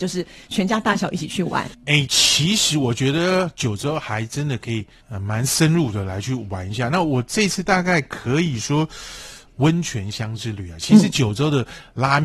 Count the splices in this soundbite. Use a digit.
1